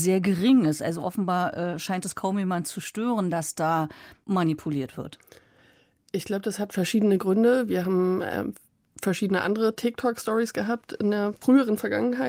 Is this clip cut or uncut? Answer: uncut